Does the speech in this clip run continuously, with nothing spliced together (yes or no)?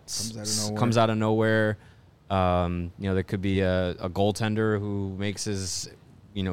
yes